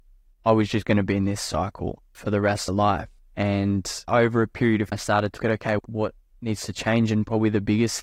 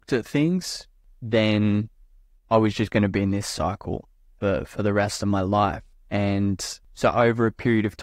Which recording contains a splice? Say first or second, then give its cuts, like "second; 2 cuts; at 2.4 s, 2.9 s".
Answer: first; 6 cuts; at 2.1 s, 2.7 s, 4.1 s, 4.9 s, 5.4 s, 5.8 s